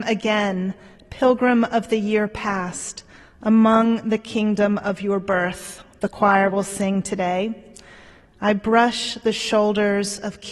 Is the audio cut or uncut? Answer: uncut